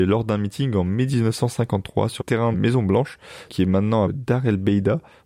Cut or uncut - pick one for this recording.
cut